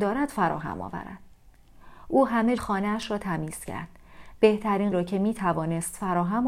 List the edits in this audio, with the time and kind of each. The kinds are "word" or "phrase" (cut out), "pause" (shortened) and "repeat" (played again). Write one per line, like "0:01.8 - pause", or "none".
0:02.6 - word
0:04.9 - word